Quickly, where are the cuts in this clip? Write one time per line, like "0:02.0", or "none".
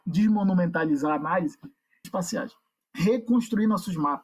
0:02.0